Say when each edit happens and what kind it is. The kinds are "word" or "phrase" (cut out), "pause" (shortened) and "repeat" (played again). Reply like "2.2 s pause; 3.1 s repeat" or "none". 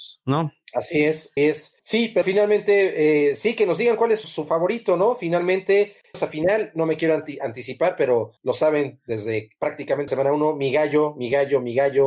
1.4 s word; 1.8 s pause; 2.2 s word; 4.2 s word; 6.1 s phrase; 8.4 s pause; 10.1 s word